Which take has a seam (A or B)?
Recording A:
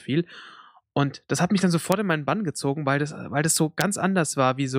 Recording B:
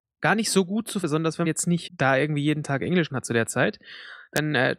B